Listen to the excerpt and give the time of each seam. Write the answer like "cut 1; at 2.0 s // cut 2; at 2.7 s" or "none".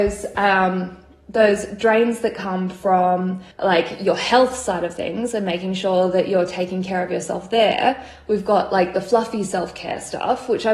cut 1; at 3.5 s